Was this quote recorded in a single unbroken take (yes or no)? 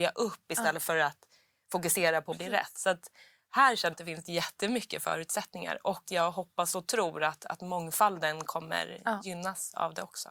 no